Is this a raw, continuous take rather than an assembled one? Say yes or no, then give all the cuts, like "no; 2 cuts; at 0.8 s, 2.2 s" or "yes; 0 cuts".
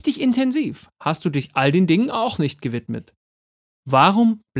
yes; 0 cuts